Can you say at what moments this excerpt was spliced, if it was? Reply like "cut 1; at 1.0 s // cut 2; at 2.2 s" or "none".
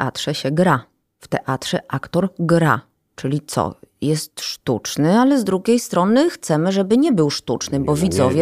none